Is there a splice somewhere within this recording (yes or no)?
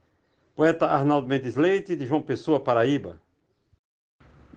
no